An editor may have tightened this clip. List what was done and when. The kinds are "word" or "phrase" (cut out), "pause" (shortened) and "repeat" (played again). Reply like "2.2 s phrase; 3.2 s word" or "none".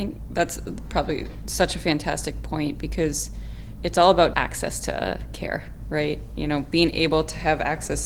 4.3 s word

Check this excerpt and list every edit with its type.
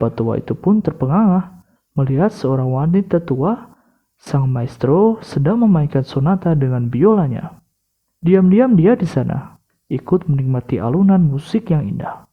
1.8 s pause

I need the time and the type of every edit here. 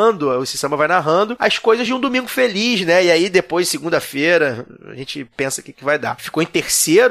none

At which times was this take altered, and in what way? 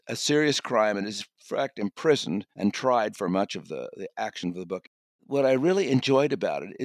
2.5 s pause

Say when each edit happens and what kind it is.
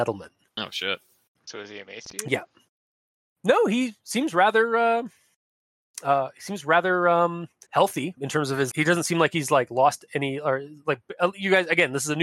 1.4 s word; 7.7 s word; 8.2 s word; 8.7 s word

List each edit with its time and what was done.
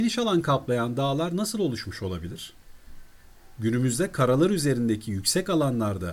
none

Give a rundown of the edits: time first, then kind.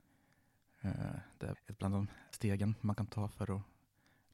1.5 s word; 2.3 s word

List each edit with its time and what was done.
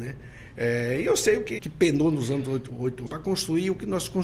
1.6 s word; 3.1 s word

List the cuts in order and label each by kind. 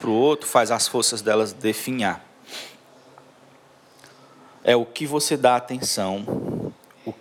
none

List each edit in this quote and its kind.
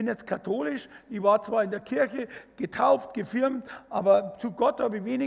none

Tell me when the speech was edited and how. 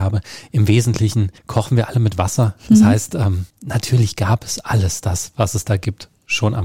1.4 s pause; 3.5 s pause

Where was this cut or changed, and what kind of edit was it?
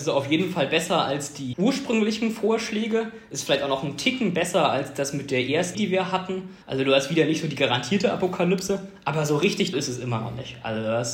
1.5 s word; 5.7 s word; 6.6 s pause; 9.7 s word

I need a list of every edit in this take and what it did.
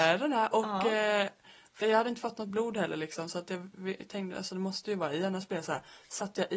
1.8 s word

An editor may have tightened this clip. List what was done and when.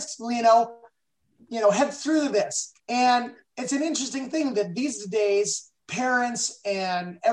2.8 s pause; 5.8 s pause

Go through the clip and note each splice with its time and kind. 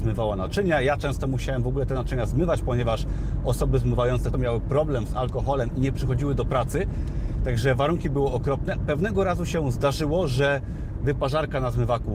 4.3 s word; 8.8 s word

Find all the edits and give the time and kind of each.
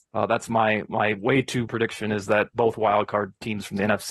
1.7 s word

